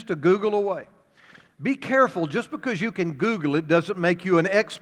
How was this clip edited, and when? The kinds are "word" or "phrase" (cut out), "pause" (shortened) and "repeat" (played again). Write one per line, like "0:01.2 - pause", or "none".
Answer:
none

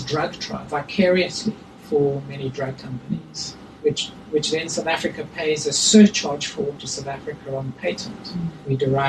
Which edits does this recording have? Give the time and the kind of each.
0:06.8 - phrase

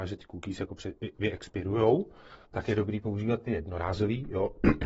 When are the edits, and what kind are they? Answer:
0:02.4 - pause

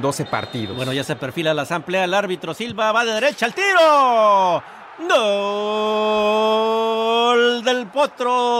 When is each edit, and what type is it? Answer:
none

